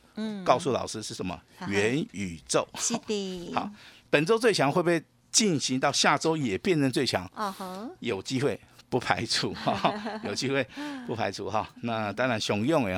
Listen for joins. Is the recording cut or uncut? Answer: uncut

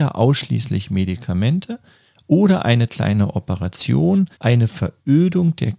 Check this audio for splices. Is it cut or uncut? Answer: cut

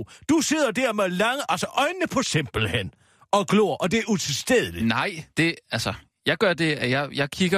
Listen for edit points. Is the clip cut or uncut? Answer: cut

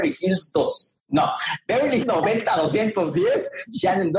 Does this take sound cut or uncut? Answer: cut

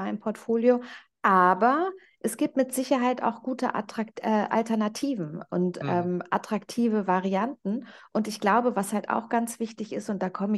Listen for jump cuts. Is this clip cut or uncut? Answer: uncut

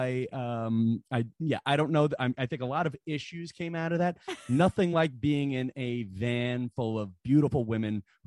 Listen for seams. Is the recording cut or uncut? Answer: uncut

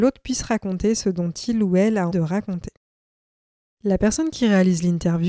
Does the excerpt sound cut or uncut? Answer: cut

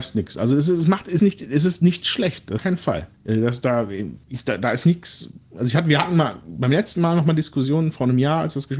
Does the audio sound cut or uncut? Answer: cut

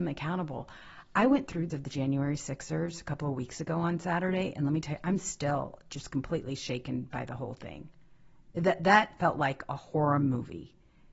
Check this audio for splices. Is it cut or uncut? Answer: cut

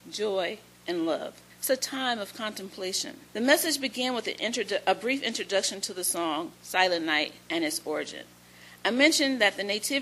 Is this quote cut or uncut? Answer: cut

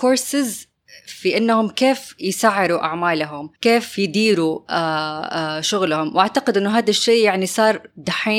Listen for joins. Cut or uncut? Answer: cut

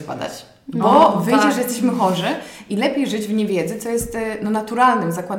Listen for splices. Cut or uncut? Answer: uncut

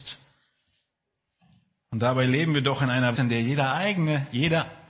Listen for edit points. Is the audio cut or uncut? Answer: cut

